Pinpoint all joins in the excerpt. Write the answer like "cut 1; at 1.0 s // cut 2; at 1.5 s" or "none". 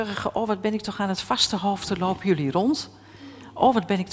none